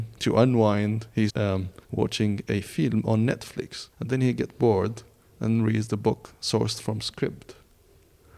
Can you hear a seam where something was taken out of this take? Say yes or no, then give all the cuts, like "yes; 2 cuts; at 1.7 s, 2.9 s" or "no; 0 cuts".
yes; 3 cuts; at 1.3 s, 1.8 s, 3.9 s